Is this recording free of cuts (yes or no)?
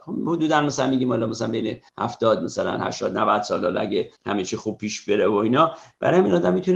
no